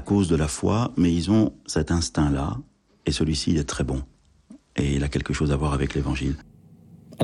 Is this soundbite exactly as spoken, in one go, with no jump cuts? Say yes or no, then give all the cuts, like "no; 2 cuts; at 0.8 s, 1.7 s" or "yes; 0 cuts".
yes; 0 cuts